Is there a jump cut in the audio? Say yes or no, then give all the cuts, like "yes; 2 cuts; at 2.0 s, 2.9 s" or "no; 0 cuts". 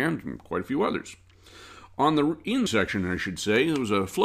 yes; 1 cut; at 2.7 s